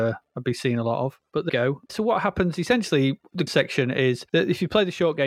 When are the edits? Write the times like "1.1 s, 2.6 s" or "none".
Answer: 1.5 s, 1.9 s, 2.6 s, 3.5 s